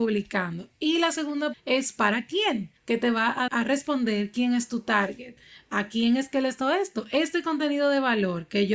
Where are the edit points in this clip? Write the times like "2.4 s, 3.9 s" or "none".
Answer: 1.5 s, 2.8 s, 3.5 s, 6.6 s